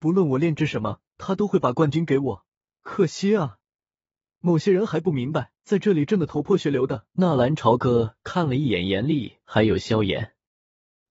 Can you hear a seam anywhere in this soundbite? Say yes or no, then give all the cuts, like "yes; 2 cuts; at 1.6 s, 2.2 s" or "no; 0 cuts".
yes; 4 cuts; at 1.1 s, 2.6 s, 5.6 s, 7.1 s